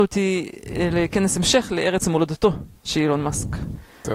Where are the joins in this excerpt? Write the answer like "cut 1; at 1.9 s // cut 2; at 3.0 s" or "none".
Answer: none